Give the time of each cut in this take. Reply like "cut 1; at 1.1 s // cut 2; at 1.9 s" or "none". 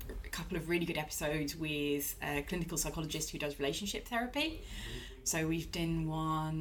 none